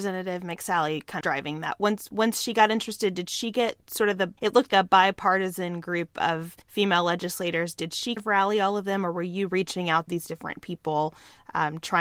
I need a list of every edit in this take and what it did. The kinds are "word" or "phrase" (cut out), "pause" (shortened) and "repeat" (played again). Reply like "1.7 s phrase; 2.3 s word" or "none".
1.2 s word; 4.4 s pause; 4.7 s word; 6.6 s pause; 8.2 s word; 10.1 s phrase